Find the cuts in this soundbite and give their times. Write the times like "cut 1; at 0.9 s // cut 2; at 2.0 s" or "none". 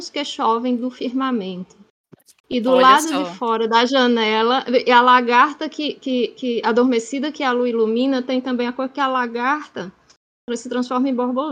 none